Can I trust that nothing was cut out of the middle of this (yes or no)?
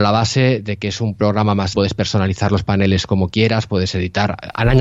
no